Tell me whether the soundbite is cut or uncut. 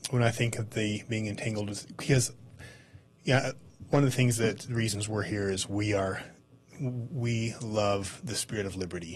uncut